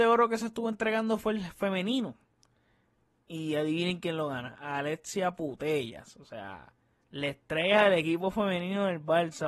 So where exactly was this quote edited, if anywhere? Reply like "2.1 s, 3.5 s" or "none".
none